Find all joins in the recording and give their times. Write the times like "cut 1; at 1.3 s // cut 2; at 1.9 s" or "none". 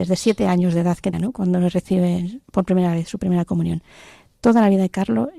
cut 1; at 1.1 s // cut 2; at 2.4 s